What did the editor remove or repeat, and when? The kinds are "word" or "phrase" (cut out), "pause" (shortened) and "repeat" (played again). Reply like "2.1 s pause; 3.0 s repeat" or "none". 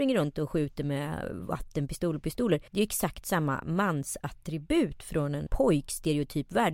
2.7 s pause; 5.5 s word